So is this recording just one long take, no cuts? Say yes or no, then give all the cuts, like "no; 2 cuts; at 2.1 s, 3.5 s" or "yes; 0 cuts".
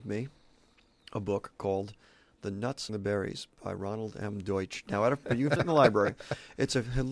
no; 3 cuts; at 2.9 s, 5.2 s, 5.6 s